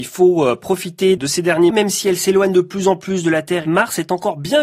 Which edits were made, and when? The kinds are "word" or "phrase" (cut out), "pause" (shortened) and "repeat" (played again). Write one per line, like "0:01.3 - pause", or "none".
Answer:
0:01.2 - word
0:01.7 - word